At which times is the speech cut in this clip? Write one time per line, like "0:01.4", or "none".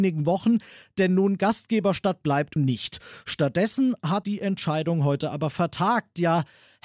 0:02.6
0:04.2